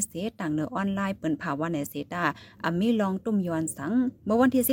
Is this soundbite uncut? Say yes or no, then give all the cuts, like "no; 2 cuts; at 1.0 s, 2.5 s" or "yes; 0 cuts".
yes; 0 cuts